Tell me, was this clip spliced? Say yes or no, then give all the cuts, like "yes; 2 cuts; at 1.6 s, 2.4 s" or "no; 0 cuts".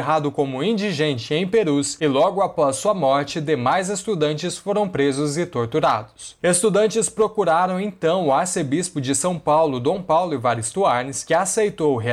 no; 0 cuts